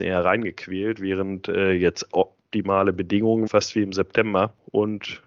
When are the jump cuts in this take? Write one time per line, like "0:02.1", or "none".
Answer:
0:03.5